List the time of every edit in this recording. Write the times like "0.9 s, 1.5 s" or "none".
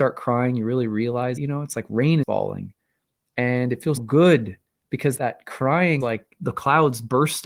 1.4 s, 2.2 s, 4.0 s, 5.2 s, 6.0 s, 6.4 s